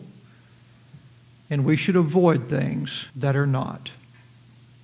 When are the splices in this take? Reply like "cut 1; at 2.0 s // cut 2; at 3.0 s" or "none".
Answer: cut 1; at 3.1 s